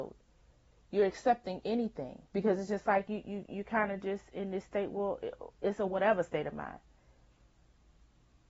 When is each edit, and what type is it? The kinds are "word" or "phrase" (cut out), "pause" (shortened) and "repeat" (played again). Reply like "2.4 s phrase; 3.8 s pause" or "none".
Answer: 2.3 s pause